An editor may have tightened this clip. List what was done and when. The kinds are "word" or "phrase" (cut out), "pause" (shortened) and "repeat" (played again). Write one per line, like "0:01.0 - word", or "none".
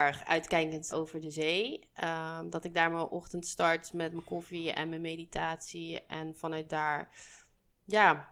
0:00.9 - word